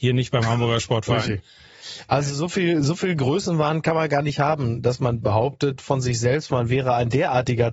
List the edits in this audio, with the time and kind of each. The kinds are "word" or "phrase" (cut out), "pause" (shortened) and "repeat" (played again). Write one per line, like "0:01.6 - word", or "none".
none